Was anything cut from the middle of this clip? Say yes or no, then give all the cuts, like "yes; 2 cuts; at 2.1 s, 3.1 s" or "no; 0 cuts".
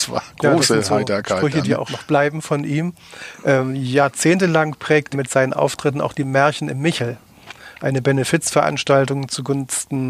yes; 2 cuts; at 1.9 s, 5.1 s